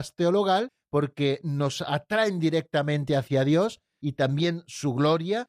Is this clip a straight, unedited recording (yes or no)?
yes